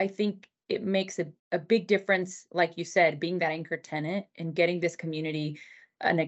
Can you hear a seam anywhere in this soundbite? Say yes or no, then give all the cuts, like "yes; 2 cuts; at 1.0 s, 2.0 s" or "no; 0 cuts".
yes; 1 cut; at 1.4 s